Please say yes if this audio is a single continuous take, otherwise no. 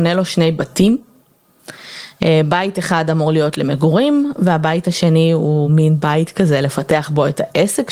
yes